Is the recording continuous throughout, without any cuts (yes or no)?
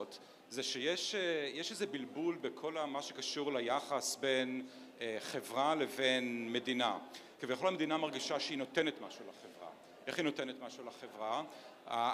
yes